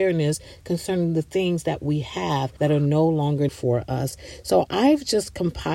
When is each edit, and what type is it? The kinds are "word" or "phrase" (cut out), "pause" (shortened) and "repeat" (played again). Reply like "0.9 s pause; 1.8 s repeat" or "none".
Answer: 2.6 s pause; 3.5 s word